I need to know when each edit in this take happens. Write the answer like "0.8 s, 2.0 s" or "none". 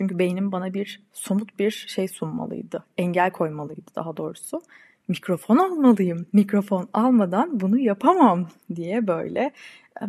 none